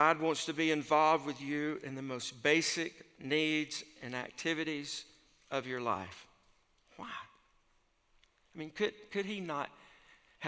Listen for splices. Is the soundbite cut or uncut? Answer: uncut